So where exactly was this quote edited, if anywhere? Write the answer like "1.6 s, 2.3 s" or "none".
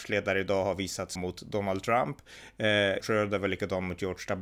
1.2 s, 3.0 s